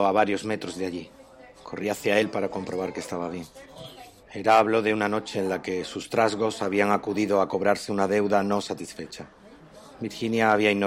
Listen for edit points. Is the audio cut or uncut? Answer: uncut